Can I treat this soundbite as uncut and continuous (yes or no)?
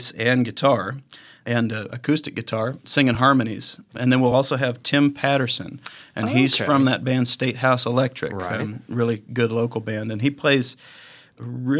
yes